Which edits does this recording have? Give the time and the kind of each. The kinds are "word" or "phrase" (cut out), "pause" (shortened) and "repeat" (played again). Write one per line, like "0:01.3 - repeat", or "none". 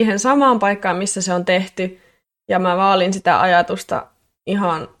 none

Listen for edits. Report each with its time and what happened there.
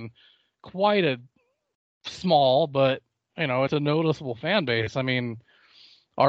none

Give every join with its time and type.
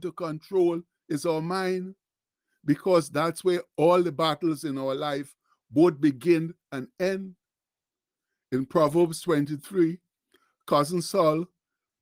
none

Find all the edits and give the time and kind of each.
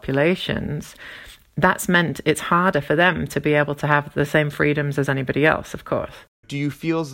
none

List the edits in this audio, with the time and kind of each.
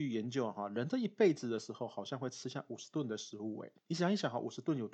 0:03.8 - pause

